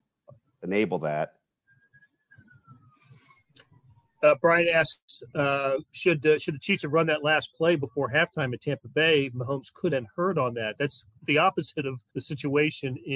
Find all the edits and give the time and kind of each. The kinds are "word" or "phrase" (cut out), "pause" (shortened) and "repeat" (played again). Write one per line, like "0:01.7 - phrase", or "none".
0:05.9 - pause
0:09.9 - word
0:11.2 - word
0:12.1 - pause